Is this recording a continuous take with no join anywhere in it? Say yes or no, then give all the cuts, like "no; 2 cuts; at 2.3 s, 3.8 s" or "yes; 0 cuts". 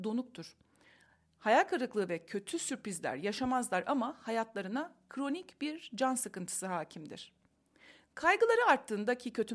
yes; 0 cuts